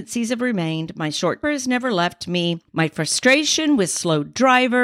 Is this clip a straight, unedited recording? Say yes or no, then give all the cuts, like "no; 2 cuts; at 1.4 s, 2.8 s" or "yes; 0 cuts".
no; 2 cuts; at 1.4 s, 2.7 s